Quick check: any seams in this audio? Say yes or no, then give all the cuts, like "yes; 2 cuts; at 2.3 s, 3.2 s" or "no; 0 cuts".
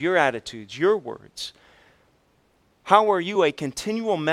no; 0 cuts